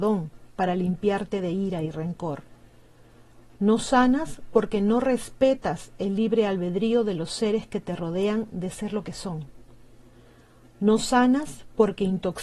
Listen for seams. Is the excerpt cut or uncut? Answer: uncut